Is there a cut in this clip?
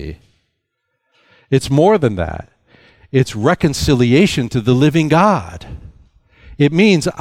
no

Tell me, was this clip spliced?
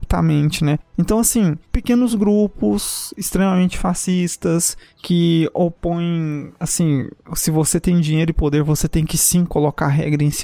no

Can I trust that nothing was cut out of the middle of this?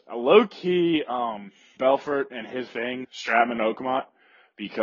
no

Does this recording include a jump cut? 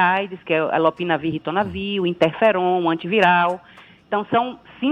no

